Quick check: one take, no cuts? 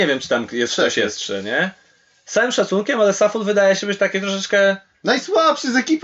yes; 0 cuts

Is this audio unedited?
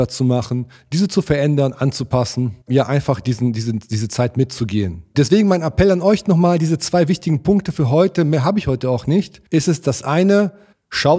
no; 2 cuts; at 2.6 s, 9.5 s

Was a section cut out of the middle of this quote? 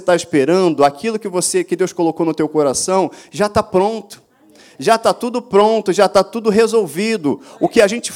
no; 0 cuts

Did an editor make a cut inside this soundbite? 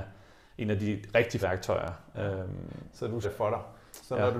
yes; 2 cuts; at 1.4 s, 3.2 s

